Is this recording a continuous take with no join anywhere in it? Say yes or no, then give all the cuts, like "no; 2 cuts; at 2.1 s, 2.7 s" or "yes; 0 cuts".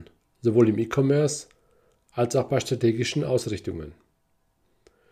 yes; 0 cuts